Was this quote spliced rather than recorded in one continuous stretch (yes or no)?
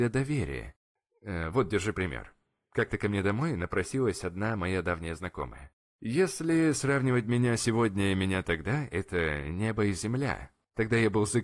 no